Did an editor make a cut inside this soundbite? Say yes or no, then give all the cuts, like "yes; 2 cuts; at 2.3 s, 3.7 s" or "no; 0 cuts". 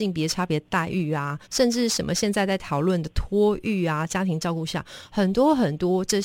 yes; 1 cut; at 1.4 s